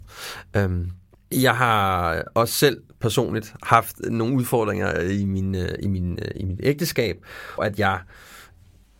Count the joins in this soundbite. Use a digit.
1